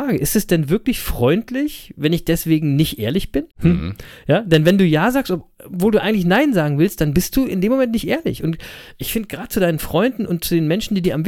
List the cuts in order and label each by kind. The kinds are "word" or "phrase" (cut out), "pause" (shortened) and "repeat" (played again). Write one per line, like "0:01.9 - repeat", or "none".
0:03.5 - pause